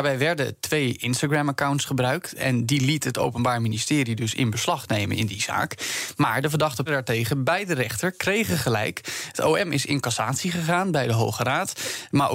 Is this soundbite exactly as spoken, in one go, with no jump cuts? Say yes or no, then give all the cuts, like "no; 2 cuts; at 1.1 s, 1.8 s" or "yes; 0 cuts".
no; 1 cut; at 6.9 s